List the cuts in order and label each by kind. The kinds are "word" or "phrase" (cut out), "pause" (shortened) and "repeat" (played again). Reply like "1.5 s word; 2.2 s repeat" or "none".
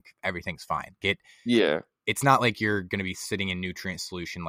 1.0 s word